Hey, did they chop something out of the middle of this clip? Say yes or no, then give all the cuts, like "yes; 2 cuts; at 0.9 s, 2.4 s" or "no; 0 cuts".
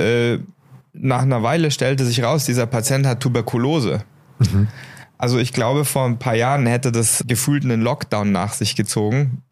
yes; 1 cut; at 7.2 s